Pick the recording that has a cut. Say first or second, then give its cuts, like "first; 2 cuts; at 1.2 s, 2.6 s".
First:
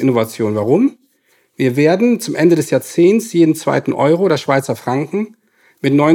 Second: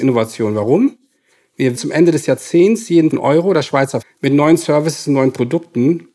second; 3 cuts; at 1.8 s, 3.1 s, 4.0 s